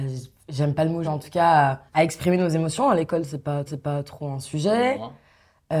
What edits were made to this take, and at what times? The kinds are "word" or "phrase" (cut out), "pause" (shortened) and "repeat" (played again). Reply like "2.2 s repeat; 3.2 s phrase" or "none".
1.0 s word; 1.9 s pause; 3.7 s repeat